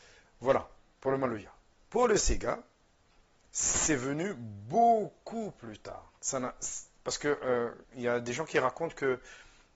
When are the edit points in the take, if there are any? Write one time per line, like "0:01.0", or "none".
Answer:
0:06.2
0:07.8